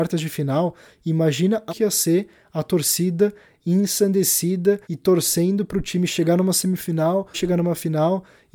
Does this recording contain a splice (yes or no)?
yes